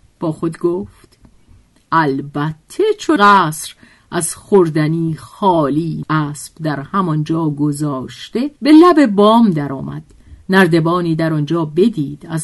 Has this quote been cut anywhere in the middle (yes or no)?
yes